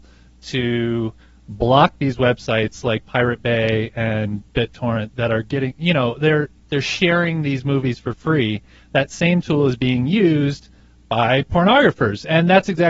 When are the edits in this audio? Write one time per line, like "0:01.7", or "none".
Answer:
none